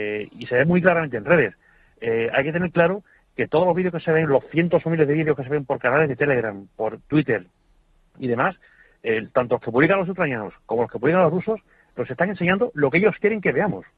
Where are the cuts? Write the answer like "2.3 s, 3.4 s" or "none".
none